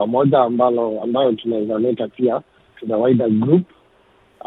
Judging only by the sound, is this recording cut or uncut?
uncut